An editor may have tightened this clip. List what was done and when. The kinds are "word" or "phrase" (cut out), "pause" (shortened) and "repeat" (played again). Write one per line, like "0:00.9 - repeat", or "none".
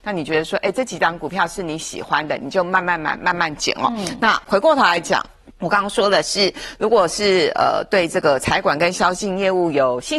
0:05.5 - pause